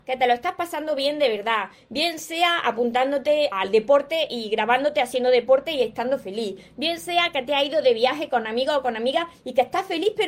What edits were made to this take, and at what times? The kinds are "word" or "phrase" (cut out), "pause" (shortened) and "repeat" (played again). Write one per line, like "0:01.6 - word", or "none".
0:03.5 - word